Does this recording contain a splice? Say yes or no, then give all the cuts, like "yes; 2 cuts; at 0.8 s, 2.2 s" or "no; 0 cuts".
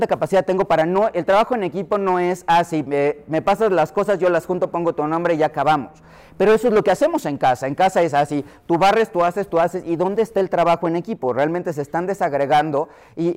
no; 0 cuts